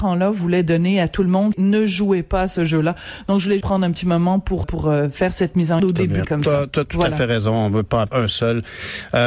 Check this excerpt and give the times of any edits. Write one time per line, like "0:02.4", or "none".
0:01.5
0:03.6
0:04.6
0:05.8
0:06.2
0:08.1